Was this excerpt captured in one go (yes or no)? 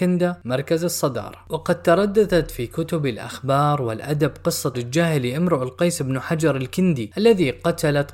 no